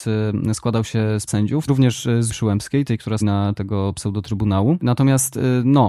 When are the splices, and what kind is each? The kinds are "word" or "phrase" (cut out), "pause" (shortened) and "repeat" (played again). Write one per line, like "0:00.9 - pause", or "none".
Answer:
0:01.3 - word
0:01.7 - word
0:02.3 - word
0:03.2 - word
0:03.5 - word